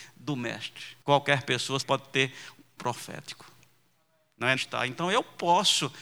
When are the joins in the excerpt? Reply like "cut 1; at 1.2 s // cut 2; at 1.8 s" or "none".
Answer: cut 1; at 1.0 s // cut 2; at 1.8 s // cut 3; at 2.8 s // cut 4; at 4.6 s